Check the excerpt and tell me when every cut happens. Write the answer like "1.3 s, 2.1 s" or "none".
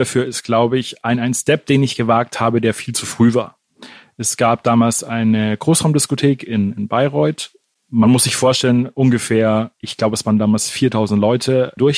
none